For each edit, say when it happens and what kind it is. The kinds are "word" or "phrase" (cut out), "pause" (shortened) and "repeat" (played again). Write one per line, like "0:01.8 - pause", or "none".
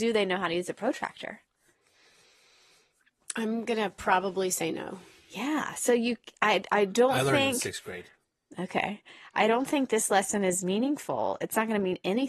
none